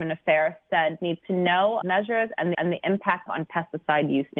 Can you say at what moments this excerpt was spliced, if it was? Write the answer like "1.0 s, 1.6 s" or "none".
1.0 s, 1.8 s, 2.5 s, 3.3 s